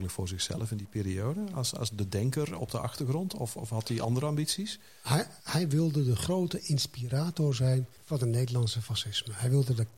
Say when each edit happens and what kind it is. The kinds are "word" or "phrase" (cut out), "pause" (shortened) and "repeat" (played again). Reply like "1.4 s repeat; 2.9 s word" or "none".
5.4 s pause; 8.0 s pause